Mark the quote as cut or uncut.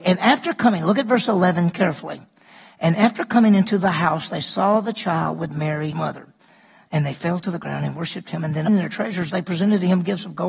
cut